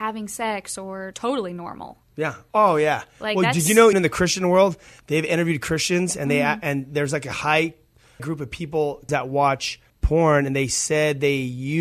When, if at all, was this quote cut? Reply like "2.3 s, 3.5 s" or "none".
1.1 s, 2.0 s, 3.9 s, 8.2 s, 9.1 s, 9.9 s

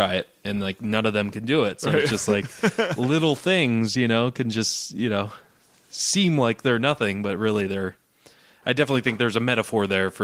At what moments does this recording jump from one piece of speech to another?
none

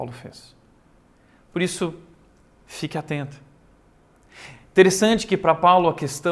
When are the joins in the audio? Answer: none

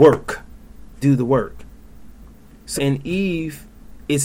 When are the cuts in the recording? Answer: 1.0 s, 2.8 s

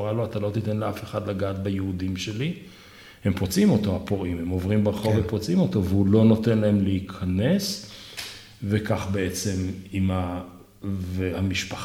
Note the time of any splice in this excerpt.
none

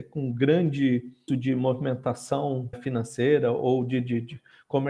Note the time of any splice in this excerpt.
1.3 s, 2.7 s

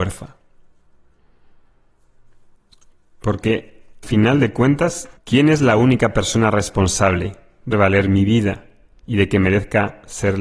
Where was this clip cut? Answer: 4.0 s, 5.2 s, 7.7 s

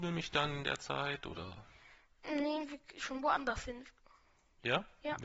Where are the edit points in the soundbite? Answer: none

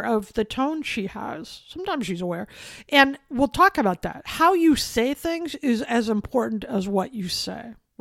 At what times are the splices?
none

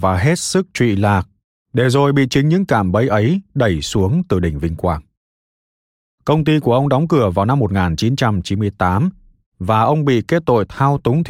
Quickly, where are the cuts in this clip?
none

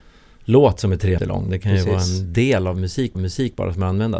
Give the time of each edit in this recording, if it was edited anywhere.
1.2 s, 3.1 s

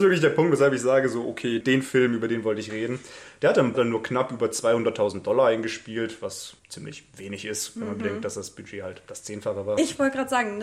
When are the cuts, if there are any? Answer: 1.6 s, 3.7 s, 6.6 s

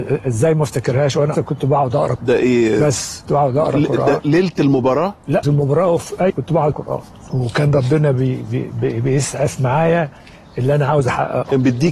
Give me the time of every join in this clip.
1.3 s, 2.2 s, 3.2 s, 5.4 s, 6.3 s, 6.7 s

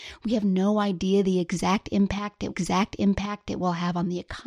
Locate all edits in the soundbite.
2.5 s

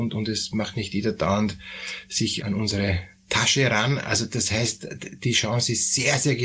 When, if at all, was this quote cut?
2.4 s

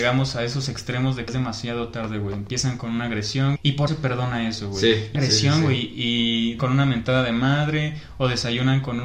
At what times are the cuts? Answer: 1.3 s, 3.6 s, 3.9 s, 5.1 s, 6.6 s

